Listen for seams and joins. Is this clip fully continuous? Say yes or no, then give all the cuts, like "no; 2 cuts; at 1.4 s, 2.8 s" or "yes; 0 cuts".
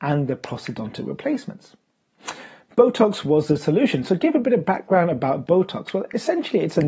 yes; 0 cuts